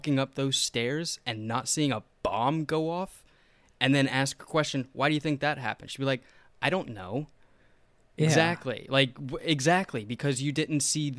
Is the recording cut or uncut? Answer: uncut